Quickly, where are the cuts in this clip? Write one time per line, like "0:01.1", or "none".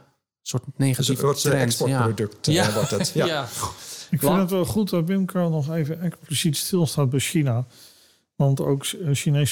none